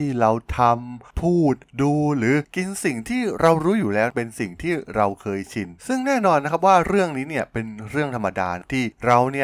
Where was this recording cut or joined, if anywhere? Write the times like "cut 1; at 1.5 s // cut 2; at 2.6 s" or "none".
cut 1; at 5.8 s